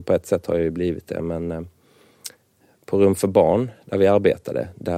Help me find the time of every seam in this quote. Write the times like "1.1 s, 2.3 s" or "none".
none